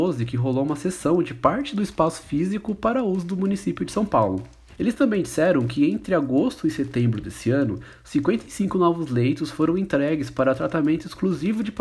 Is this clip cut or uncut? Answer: uncut